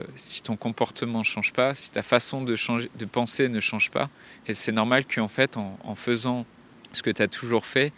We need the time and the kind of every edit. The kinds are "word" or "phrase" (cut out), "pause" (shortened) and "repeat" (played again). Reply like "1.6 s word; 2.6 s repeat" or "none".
none